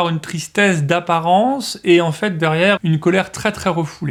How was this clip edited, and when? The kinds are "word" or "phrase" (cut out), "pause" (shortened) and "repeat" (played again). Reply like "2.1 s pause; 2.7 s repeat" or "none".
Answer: 2.8 s word